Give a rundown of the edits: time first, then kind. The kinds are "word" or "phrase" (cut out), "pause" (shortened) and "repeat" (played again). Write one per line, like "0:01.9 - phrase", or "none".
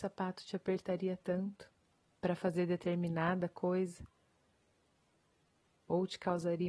none